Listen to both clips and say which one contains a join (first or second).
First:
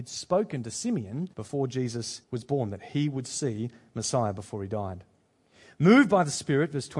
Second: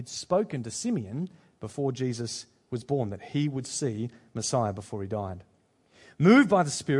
first